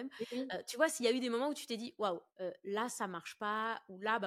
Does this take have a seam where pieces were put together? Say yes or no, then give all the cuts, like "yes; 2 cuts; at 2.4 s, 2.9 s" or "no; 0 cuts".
no; 0 cuts